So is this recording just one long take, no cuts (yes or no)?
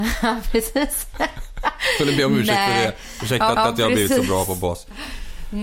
no